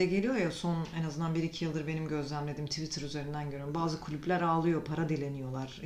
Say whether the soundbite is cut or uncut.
uncut